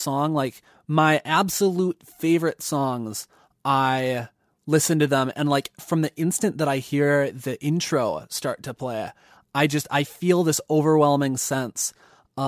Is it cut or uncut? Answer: uncut